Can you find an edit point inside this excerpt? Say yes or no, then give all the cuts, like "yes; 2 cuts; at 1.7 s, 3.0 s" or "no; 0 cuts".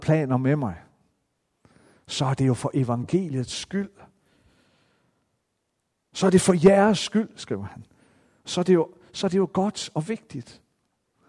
no; 0 cuts